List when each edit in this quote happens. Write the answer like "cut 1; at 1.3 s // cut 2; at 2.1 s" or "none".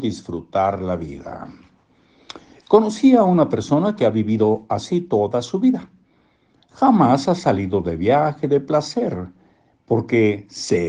none